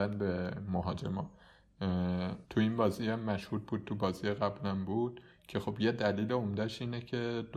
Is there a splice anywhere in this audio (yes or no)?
yes